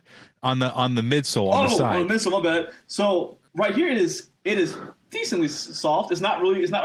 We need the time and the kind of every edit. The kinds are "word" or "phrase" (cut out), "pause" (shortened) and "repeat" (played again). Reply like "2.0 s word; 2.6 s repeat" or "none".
3.5 s pause; 4.4 s pause